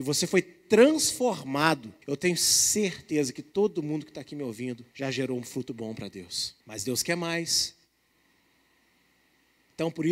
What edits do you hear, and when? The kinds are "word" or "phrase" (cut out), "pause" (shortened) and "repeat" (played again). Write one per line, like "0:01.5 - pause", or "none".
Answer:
0:02.0 - pause
0:04.9 - pause
0:06.6 - pause